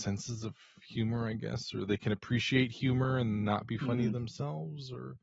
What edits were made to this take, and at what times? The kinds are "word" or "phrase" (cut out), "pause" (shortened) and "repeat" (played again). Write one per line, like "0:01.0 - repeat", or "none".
0:03.4 - word